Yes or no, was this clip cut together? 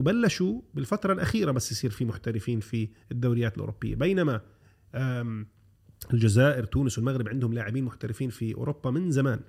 no